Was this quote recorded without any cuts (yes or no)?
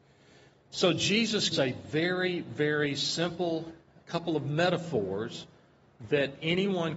no